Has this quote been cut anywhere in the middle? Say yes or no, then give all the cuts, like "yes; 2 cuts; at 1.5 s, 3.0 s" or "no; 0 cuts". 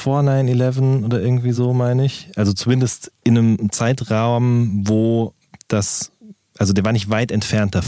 no; 0 cuts